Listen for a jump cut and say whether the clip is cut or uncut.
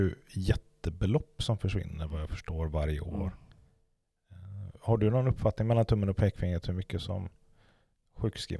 uncut